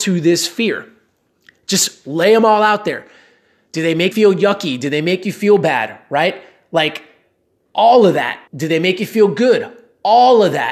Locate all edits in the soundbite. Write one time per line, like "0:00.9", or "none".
0:04.1
0:08.5